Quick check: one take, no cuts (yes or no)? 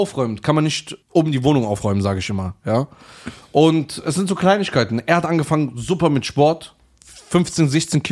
no